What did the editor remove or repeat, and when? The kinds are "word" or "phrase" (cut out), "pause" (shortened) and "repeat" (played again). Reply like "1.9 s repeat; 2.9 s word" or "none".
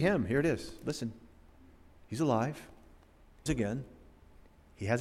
3.5 s word

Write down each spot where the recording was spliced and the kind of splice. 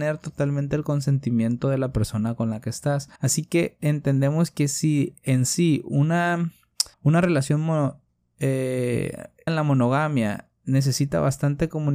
3.2 s pause; 6.9 s pause; 9.5 s word

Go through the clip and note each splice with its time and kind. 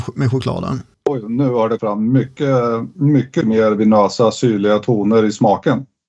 1.8 s word; 3.4 s word

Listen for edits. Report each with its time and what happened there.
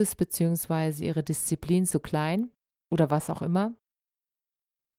none

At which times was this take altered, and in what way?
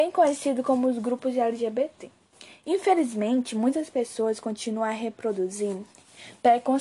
none

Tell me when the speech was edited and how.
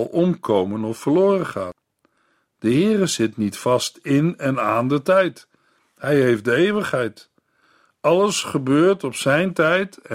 none

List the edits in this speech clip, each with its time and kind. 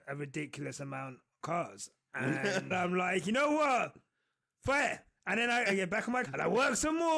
1.4 s word; 2.7 s word; 5.7 s word; 6.3 s word

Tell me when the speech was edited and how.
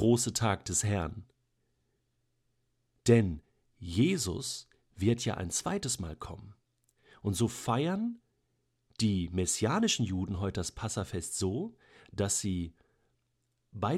none

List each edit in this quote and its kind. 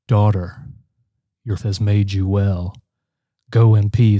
1.6 s word

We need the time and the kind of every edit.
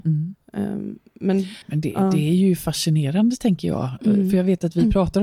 1.6 s pause

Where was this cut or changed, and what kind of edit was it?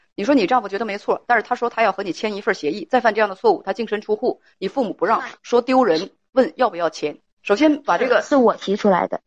7.3 s pause

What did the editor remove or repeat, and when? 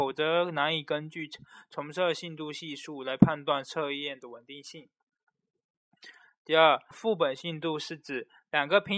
6.9 s word

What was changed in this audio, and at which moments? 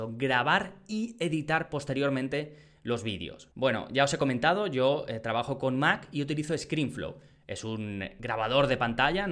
none

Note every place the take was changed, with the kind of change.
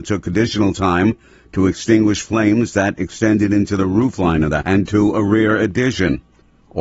4.6 s word

